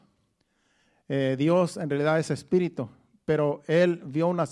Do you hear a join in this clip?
no; 0 cuts

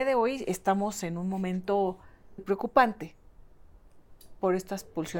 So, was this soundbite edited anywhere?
yes; 1 cut; at 2.4 s

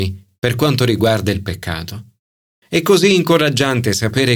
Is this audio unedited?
yes; 0 cuts

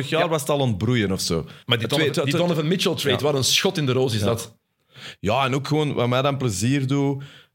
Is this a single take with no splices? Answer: no; 1 cut; at 1.6 s

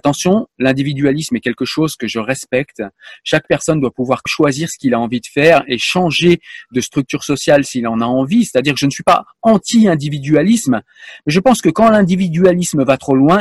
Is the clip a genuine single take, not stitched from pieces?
no; 1 cut; at 4.3 s

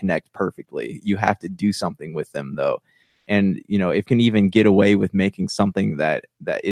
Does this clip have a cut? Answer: yes; 1 cut; at 4.1 s

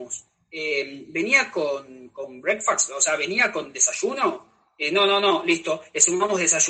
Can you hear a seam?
no; 0 cuts

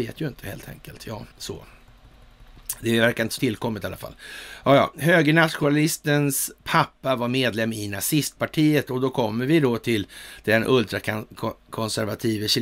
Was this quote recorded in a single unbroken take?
no; 3 cuts; at 1.3 s, 3.4 s, 6.6 s

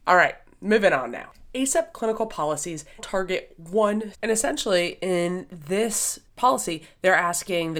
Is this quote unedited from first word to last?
no; 3 cuts; at 3.0 s, 4.1 s, 6.3 s

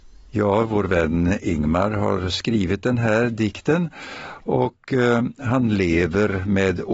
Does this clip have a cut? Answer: no; 0 cuts

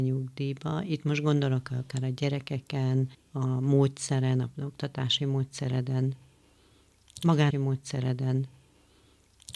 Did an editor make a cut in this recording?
yes; 2 cuts; at 3.1 s, 7.5 s

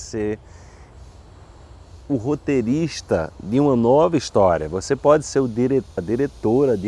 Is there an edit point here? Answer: yes; 1 cut; at 6.0 s

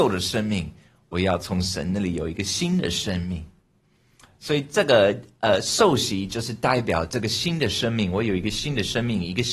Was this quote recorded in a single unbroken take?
yes; 0 cuts

